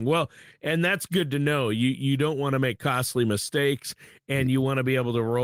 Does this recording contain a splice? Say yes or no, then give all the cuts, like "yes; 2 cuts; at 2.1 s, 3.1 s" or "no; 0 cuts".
no; 0 cuts